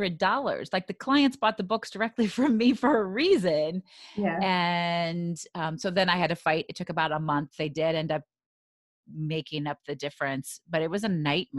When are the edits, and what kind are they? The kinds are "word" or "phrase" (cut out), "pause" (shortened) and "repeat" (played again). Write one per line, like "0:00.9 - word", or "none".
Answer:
none